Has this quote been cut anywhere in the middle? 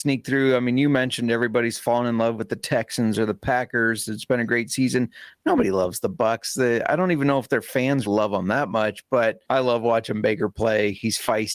yes; 2 cuts; at 8.1 s, 9.4 s

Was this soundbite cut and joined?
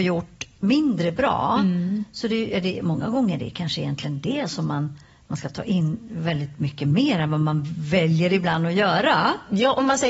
no; 0 cuts

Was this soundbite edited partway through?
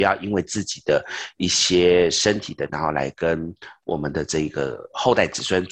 yes; 1 cut; at 2.7 s

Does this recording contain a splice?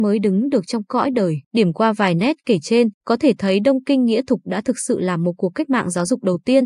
yes; 2 cuts; at 1.4 s, 2.9 s

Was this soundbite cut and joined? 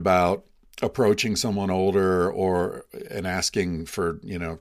no; 0 cuts

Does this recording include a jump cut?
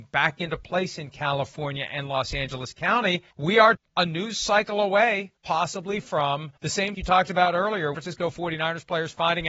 yes; 6 cuts; at 3.3 s, 3.7 s, 5.4 s, 6.6 s, 6.9 s, 7.9 s

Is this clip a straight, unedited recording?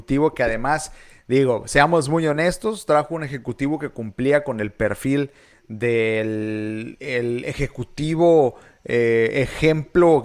yes; 0 cuts

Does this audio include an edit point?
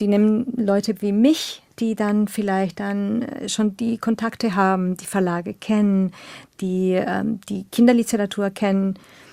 no; 0 cuts

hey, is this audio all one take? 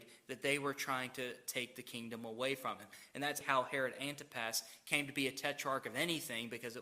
no; 1 cut; at 3.4 s

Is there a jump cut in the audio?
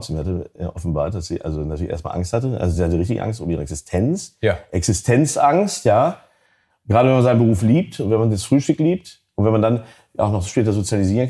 no; 0 cuts

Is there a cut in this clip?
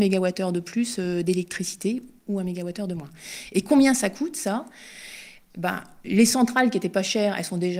no; 0 cuts

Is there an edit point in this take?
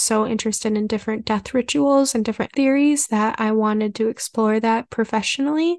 yes; 1 cut; at 2.5 s

